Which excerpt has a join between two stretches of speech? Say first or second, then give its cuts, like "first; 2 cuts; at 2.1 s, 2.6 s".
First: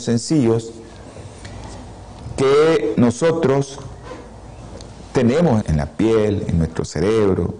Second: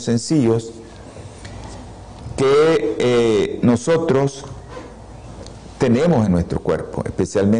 first; 2 cuts; at 3.0 s, 5.6 s